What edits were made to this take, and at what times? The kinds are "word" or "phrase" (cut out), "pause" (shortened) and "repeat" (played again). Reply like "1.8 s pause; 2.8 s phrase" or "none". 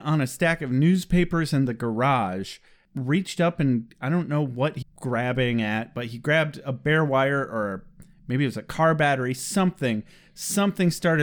4.8 s word